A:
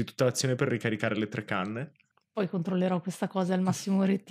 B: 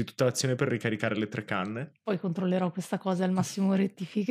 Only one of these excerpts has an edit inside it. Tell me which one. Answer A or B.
B